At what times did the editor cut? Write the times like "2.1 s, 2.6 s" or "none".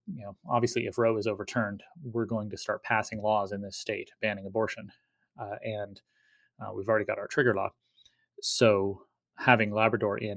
none